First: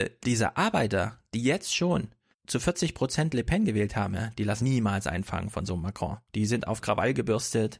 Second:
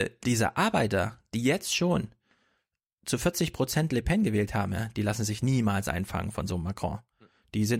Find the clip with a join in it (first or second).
first